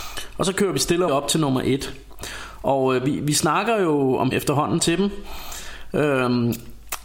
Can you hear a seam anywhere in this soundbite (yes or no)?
yes